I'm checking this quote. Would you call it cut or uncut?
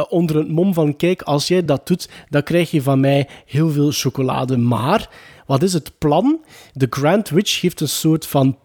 uncut